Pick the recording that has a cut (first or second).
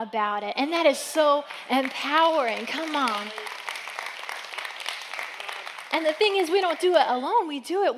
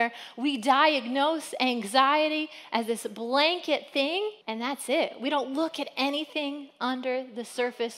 second